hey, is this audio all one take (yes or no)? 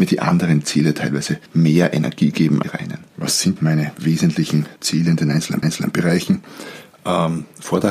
no